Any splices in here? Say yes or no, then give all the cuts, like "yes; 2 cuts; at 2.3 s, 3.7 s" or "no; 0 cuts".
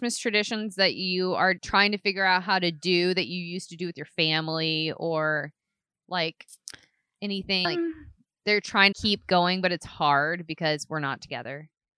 yes; 3 cuts; at 1.6 s, 7.6 s, 8.9 s